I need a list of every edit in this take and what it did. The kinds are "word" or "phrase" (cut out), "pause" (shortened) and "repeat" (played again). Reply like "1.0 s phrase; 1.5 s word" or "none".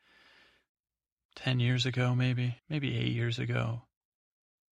2.6 s pause